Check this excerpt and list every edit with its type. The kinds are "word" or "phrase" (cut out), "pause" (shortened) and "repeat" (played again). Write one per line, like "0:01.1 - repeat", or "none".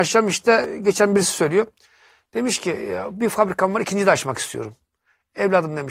none